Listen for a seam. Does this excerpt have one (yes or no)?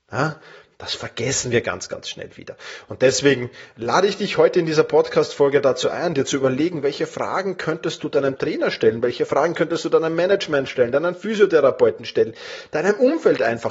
no